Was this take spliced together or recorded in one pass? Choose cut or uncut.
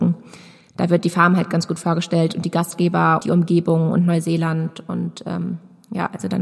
cut